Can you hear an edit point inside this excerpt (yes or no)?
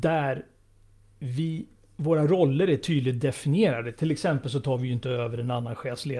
no